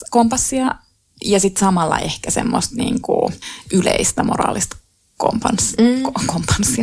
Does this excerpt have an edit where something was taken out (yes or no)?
no